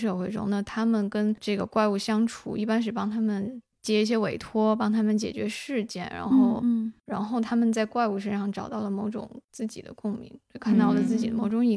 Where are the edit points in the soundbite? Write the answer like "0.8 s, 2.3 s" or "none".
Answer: none

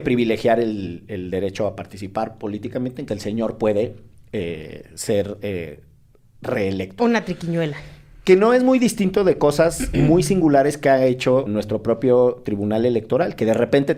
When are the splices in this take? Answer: 3.1 s, 11.5 s

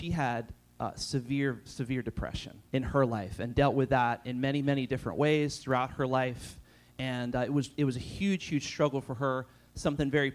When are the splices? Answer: 2.7 s

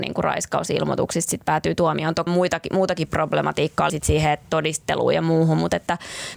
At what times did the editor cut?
2.3 s, 3.9 s

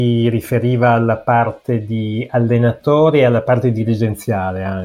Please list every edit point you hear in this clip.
none

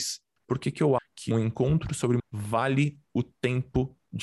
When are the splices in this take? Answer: 1.0 s, 1.3 s, 2.2 s

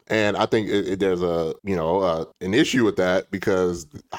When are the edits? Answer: 1.6 s, 2.3 s

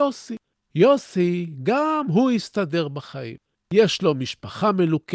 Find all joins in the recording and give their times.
none

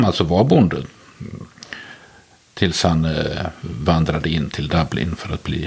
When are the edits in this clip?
none

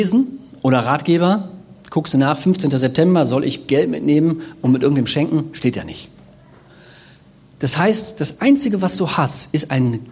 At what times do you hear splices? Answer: none

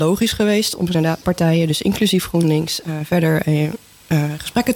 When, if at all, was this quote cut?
1.2 s

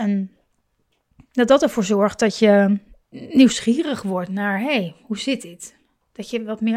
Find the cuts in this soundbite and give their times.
none

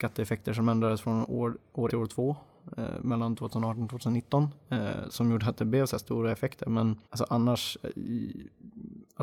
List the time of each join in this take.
1.9 s, 7.0 s

